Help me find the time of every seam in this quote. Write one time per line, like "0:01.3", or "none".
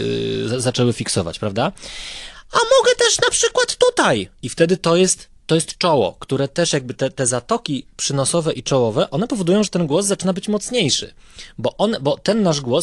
none